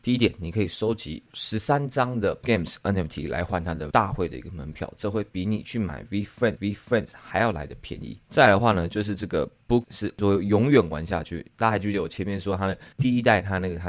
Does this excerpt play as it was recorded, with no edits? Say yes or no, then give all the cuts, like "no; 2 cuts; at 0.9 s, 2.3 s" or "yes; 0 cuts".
no; 5 cuts; at 2.4 s, 3.9 s, 6.6 s, 9.8 s, 12.9 s